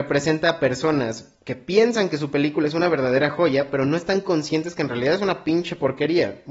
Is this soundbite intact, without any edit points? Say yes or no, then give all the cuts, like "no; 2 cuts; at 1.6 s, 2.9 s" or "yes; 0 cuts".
yes; 0 cuts